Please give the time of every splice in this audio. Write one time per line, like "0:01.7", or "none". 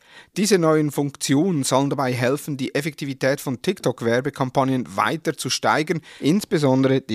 none